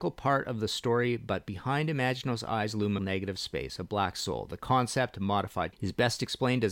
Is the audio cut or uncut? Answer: cut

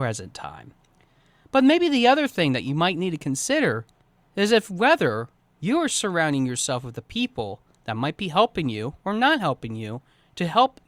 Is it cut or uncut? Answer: uncut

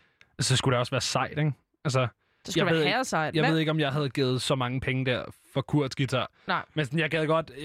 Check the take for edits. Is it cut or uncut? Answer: uncut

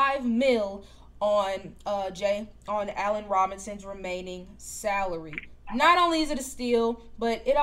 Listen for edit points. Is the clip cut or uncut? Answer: uncut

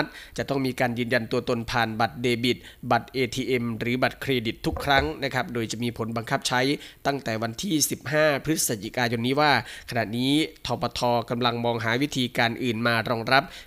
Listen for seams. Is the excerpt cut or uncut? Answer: uncut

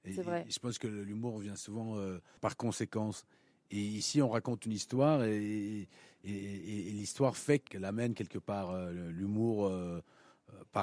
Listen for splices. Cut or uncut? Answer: uncut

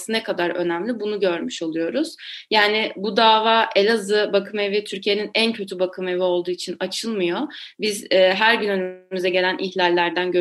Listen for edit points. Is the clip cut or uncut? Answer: uncut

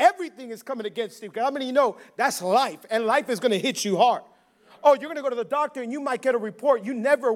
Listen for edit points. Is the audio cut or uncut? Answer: uncut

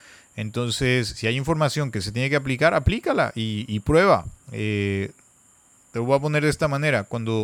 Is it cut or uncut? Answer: cut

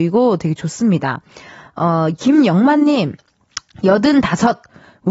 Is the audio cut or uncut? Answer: uncut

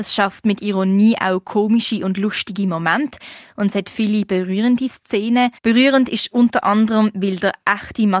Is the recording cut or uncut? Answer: cut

